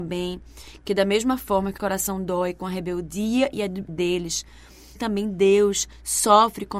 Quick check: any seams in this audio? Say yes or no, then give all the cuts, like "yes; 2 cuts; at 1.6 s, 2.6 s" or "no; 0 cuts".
yes; 3 cuts; at 1.8 s, 3.9 s, 5.0 s